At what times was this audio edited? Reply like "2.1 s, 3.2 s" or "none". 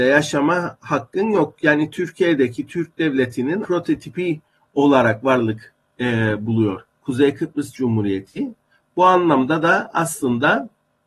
3.6 s, 6.9 s, 7.7 s